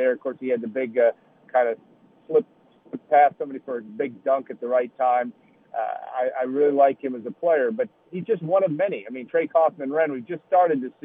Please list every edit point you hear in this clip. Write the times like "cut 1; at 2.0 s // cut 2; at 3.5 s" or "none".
none